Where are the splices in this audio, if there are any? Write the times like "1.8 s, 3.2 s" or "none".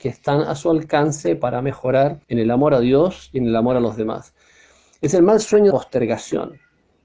2.2 s, 5.7 s

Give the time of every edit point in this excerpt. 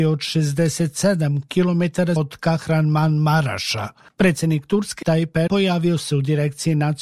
2.2 s, 5.0 s, 5.5 s

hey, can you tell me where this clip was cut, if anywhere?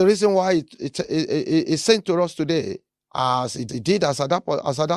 2.9 s, 3.7 s

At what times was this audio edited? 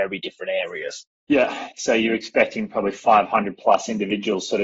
none

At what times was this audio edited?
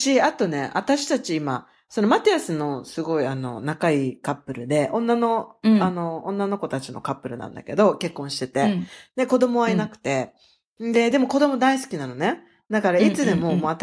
none

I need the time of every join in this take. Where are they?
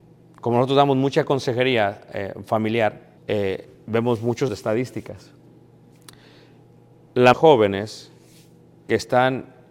3.2 s, 4.5 s, 7.3 s

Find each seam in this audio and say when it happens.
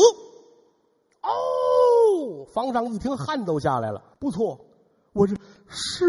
4.1 s

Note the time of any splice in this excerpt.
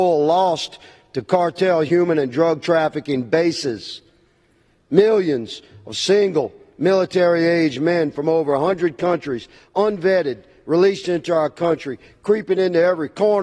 none

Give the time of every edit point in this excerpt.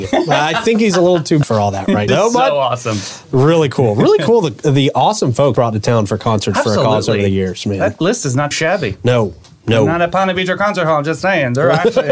1.4 s, 2.1 s, 5.5 s, 8.5 s

